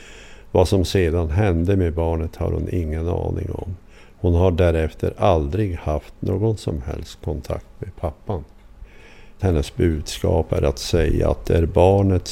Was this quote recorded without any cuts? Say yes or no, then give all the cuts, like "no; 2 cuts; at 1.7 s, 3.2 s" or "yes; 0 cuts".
yes; 0 cuts